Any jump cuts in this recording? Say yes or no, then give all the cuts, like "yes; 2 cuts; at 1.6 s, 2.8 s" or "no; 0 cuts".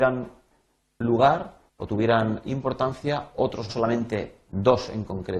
yes; 3 cuts; at 1.7 s, 2.4 s, 3.7 s